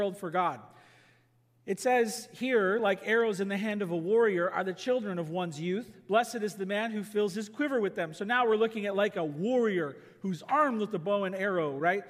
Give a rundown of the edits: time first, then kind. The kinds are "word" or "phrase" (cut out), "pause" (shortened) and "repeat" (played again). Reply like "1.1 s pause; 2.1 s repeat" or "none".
none